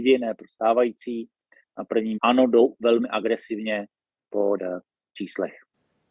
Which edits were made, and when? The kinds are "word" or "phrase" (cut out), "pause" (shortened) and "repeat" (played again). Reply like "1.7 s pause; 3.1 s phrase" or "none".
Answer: 2.2 s word; 4.6 s word

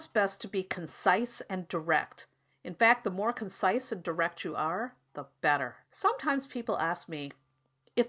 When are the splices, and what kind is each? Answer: 5.8 s pause

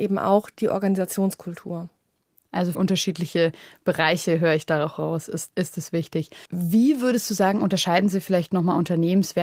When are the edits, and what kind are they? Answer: 2.7 s phrase; 5.5 s word; 6.5 s pause

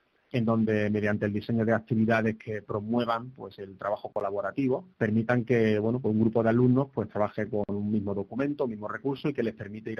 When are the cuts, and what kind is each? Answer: 4.9 s pause

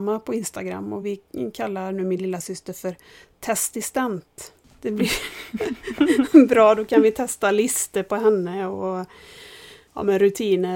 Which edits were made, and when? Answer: none

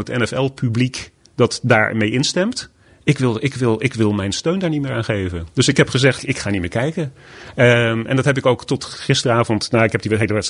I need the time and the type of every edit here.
6.2 s phrase

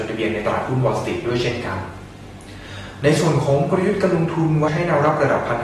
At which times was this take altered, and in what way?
4.7 s word

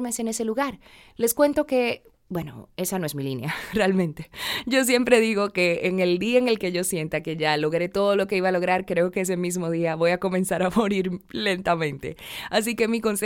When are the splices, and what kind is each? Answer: none

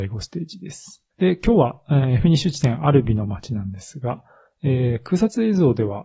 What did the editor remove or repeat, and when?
1.1 s pause

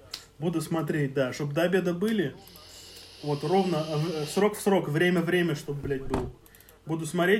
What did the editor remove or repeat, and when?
none

